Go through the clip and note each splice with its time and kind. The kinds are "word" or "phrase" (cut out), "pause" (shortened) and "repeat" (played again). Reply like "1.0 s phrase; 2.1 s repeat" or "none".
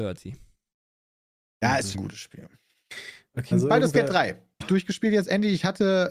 1.9 s word; 3.5 s word; 4.6 s word